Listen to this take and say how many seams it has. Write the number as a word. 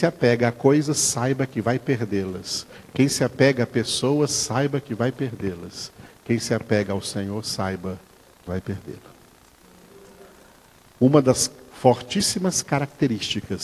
one